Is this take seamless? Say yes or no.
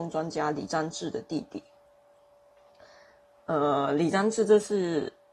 yes